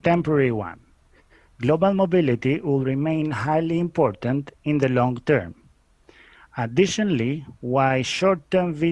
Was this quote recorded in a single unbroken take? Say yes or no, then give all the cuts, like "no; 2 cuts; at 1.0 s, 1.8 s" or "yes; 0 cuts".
yes; 0 cuts